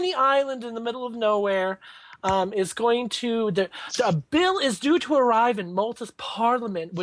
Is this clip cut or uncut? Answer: uncut